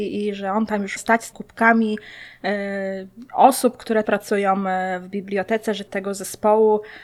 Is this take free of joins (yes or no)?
no